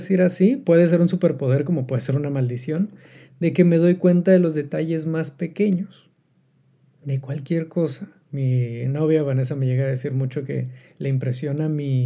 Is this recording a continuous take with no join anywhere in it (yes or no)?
yes